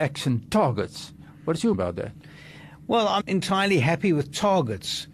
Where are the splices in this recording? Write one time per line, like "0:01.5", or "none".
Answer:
0:01.7
0:03.2